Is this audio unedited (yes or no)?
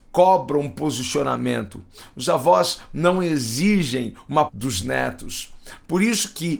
no